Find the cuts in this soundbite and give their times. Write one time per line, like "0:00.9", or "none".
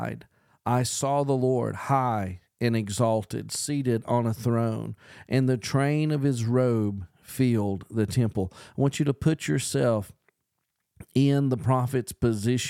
none

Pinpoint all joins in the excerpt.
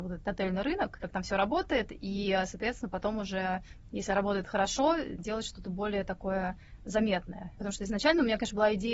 0:01.0

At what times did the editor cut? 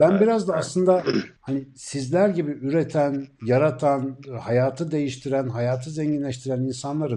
0:01.4

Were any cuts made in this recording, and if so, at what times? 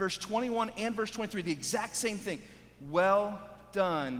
none

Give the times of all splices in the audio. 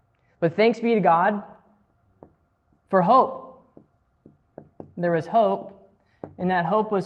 none

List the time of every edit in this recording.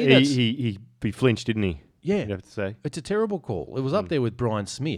none

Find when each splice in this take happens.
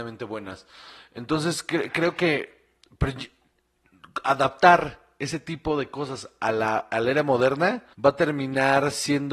0:07.9

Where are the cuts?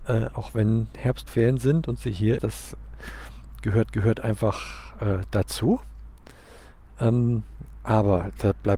0:02.4
0:03.9

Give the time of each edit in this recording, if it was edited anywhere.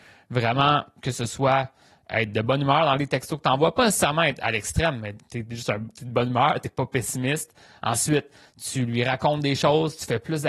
none

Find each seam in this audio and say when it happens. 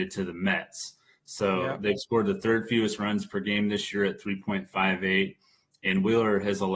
none

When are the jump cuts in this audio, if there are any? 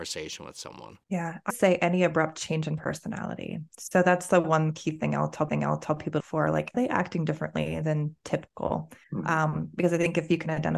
0:01.0
0:01.5
0:05.5
0:06.2
0:06.7
0:09.0

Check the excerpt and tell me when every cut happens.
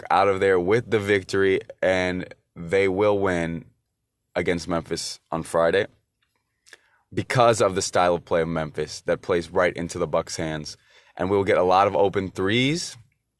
none

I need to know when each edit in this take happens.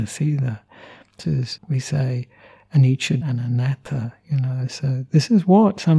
0:01.2
0:01.6
0:03.2

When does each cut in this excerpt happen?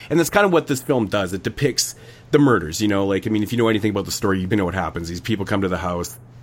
0:04.5

